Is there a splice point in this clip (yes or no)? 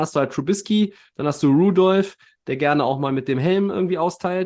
no